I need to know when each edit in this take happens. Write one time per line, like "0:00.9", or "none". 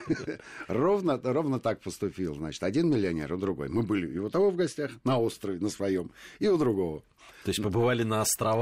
none